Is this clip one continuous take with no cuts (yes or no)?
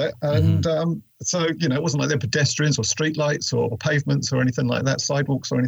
no